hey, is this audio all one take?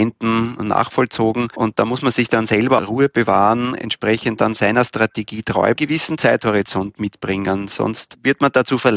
no; 2 cuts; at 2.8 s, 5.8 s

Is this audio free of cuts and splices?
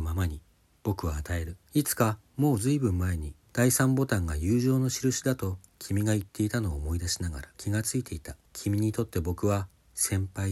no; 4 cuts; at 1.6 s, 3.4 s, 7.5 s, 8.4 s

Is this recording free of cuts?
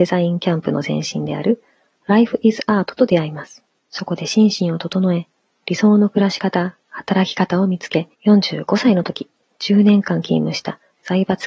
no; 3 cuts; at 3.8 s, 6.8 s, 8.1 s

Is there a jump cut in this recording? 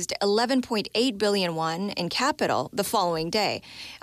no; 0 cuts

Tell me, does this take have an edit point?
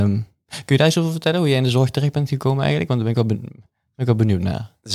no; 0 cuts

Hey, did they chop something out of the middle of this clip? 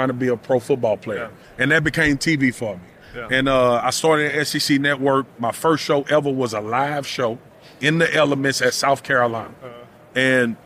no; 0 cuts

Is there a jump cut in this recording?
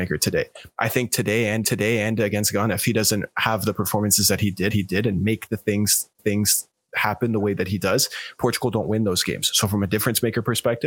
yes; 3 cuts; at 1.6 s, 4.7 s, 6.2 s

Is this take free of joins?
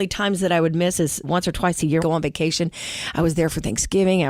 no; 2 cuts; at 1.2 s, 2.0 s

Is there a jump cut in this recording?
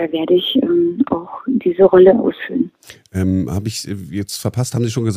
no; 0 cuts

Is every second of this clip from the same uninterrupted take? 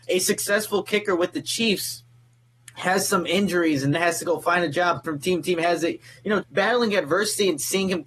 no; 3 cuts; at 3.9 s, 5.0 s, 6.4 s

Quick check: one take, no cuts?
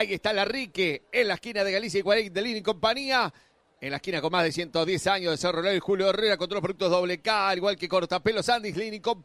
yes; 0 cuts

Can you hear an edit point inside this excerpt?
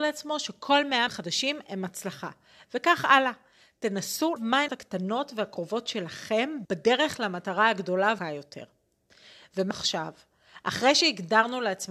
yes; 6 cuts; at 1.1 s, 4.4 s, 4.7 s, 6.6 s, 8.2 s, 9.7 s

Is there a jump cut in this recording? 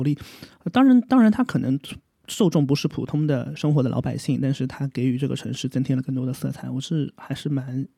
no; 0 cuts

